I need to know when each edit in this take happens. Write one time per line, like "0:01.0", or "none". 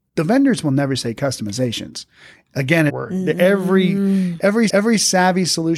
0:02.9
0:04.7